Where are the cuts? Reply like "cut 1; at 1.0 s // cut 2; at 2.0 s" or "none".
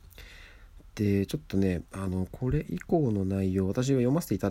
cut 1; at 1.9 s